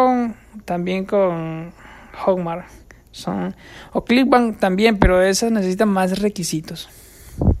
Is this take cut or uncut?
uncut